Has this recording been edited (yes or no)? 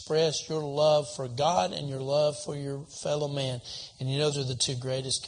yes